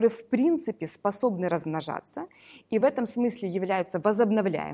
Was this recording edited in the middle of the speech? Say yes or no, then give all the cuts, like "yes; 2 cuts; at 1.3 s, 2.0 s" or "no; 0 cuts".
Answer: no; 0 cuts